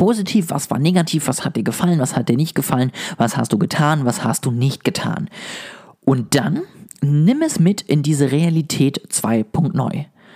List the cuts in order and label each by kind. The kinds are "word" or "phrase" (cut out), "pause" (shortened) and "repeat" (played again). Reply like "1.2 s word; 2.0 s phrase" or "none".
none